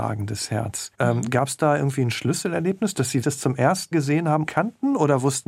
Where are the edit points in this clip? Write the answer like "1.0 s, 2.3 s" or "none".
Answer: 0.9 s, 3.2 s, 3.9 s, 4.5 s